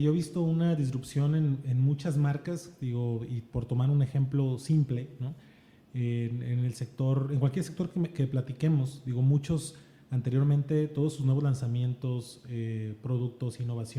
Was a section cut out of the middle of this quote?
no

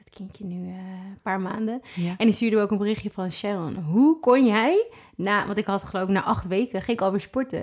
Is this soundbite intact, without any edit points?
yes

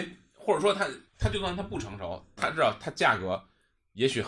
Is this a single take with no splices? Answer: no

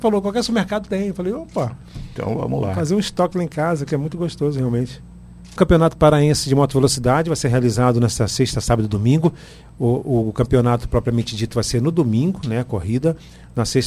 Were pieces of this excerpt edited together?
no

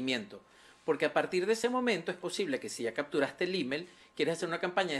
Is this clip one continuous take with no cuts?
yes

